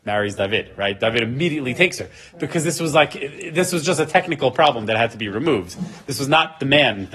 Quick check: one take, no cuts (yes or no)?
yes